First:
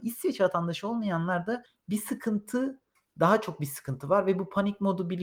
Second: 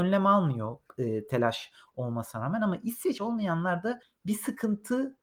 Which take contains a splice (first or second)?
second